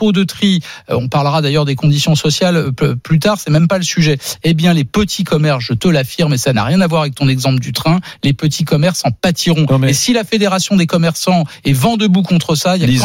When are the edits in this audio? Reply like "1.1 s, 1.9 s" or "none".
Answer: none